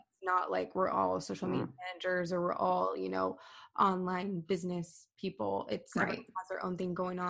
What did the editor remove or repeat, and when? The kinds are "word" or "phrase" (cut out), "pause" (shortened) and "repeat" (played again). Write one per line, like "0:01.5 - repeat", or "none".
none